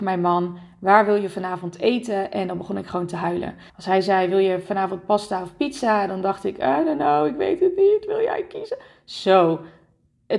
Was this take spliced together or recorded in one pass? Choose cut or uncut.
cut